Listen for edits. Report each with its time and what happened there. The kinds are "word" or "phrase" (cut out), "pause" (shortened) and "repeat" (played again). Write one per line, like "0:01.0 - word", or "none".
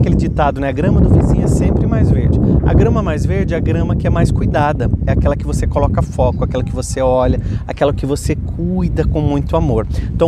none

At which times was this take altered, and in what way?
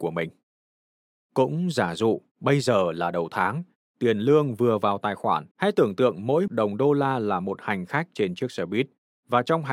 0:05.5 - pause
0:06.5 - word

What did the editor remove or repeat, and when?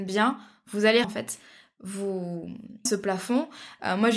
0:01.0 - word
0:02.9 - word

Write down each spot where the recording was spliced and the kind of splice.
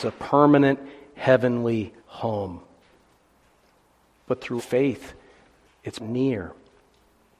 0:02.0 - pause
0:04.6 - phrase
0:06.0 - word

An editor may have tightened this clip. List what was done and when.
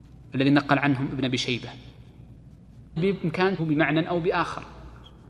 0:03.0 - word
0:03.6 - phrase

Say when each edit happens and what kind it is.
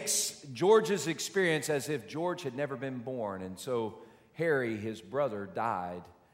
none

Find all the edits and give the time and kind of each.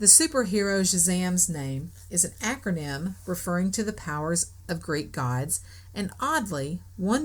none

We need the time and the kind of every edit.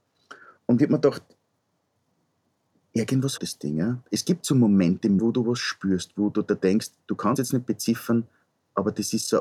0:03.4 - word
0:05.2 - word
0:07.4 - word

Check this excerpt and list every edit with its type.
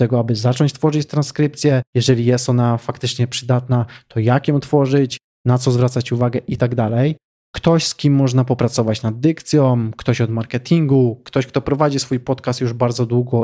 0:01.9 - pause

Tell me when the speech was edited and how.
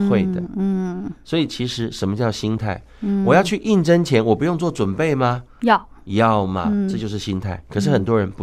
none

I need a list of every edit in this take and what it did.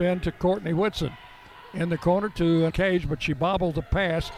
0:02.7 - word

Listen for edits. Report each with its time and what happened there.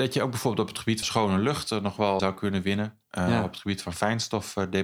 0:01.0 - word
0:02.2 - word

